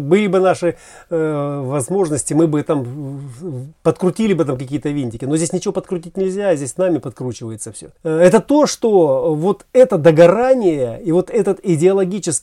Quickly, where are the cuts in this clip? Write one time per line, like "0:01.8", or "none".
0:08.0